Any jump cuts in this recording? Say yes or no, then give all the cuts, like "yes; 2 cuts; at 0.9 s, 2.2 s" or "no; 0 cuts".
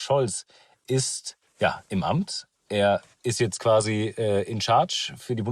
yes; 1 cut; at 1.5 s